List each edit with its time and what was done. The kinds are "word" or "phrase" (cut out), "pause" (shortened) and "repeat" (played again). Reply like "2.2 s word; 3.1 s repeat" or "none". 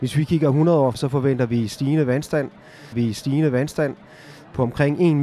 0.9 s word; 2.9 s repeat